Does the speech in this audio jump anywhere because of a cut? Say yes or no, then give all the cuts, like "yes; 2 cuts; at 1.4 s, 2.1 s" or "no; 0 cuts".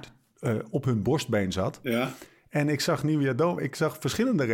no; 0 cuts